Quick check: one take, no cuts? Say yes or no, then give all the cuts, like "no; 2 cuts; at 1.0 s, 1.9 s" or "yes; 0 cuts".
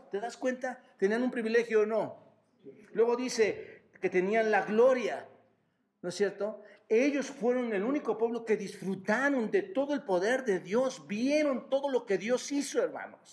yes; 0 cuts